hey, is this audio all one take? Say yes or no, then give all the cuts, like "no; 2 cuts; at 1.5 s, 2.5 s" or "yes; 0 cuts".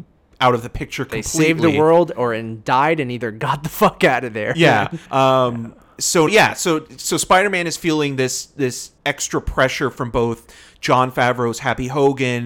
no; 3 cuts; at 5.1 s, 6.3 s, 9.0 s